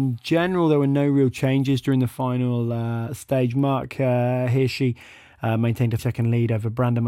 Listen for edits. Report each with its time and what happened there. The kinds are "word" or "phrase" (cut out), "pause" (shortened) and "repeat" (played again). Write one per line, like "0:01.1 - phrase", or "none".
0:06.0 - word

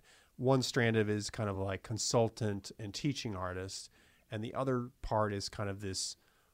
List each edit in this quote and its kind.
none

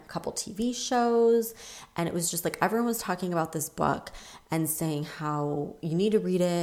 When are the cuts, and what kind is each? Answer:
none

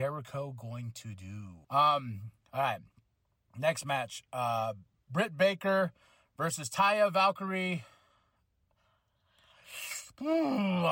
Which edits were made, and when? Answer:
0:01.6 - pause

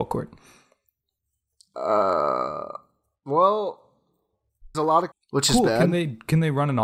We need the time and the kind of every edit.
0:04.7 - word
0:05.1 - phrase

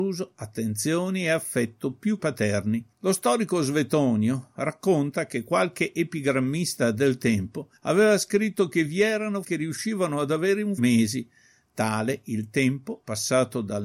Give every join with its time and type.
0:02.2 - word
0:02.9 - pause
0:07.8 - pause
0:09.4 - word
0:10.8 - phrase

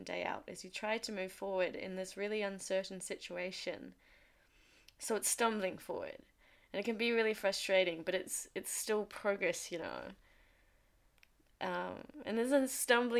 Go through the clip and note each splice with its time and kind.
none

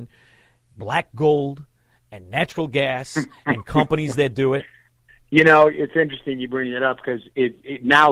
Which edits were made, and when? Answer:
0:05.1 - pause

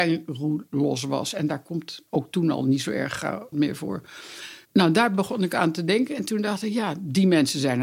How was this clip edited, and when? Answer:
0:03.5 - word
0:04.6 - pause

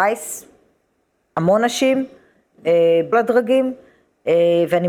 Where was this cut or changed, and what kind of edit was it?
0:03.1 - word

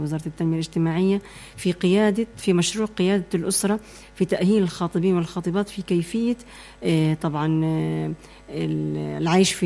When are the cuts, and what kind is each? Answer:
none

